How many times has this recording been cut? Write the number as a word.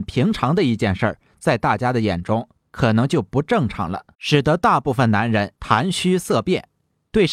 two